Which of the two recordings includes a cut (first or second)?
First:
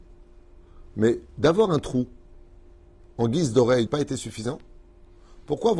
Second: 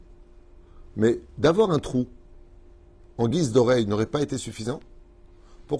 first